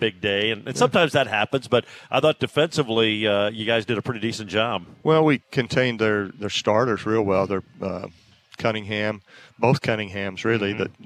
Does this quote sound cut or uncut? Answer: uncut